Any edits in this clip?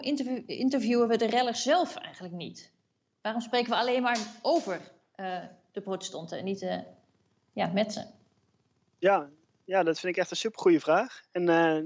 no; 0 cuts

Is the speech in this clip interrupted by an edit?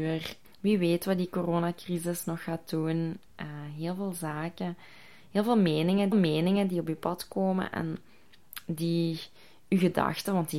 yes; 1 cut; at 6.1 s

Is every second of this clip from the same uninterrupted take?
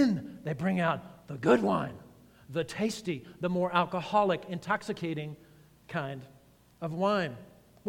yes; 0 cuts

